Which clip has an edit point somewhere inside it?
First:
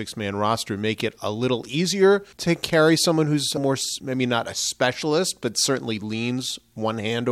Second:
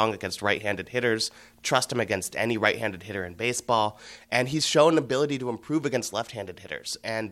first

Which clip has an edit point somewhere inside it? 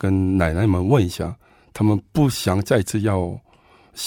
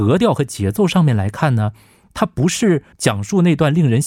second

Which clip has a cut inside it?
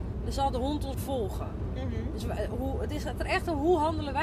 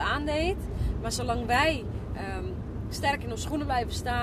first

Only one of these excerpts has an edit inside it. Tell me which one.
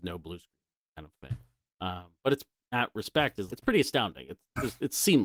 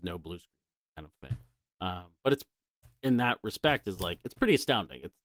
first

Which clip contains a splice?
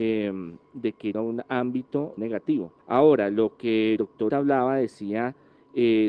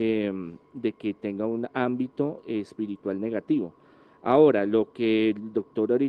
first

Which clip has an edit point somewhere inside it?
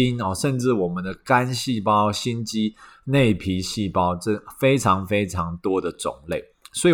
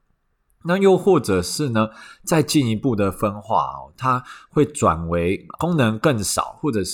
second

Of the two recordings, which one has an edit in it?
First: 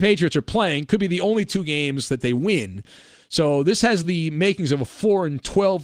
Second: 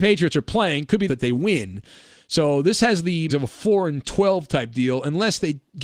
second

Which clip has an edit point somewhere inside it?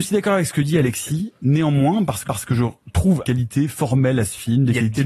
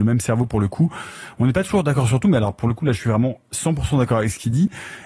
first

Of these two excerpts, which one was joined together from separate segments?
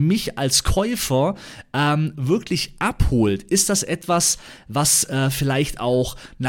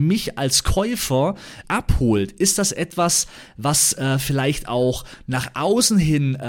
second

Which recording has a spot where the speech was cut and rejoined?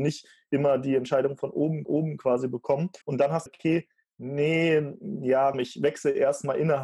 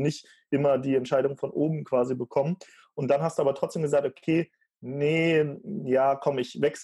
first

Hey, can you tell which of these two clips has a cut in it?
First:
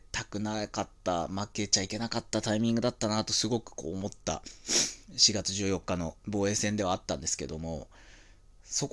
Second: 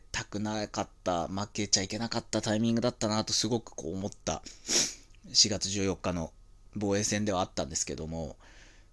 first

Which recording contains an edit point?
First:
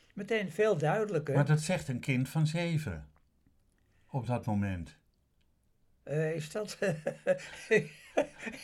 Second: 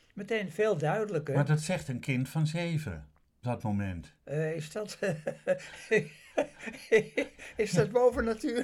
second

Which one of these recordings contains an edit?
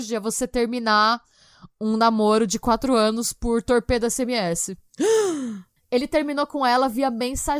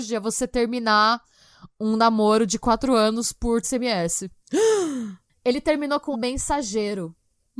second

